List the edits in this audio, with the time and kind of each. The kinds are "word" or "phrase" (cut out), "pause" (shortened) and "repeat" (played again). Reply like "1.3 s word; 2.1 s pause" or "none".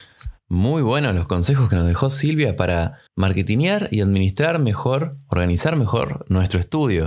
3.1 s pause